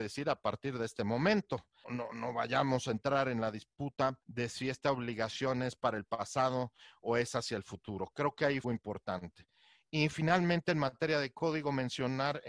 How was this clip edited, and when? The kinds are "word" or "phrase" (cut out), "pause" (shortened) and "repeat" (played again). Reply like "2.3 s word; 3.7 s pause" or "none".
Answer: 1.8 s word; 4.2 s pause; 8.6 s phrase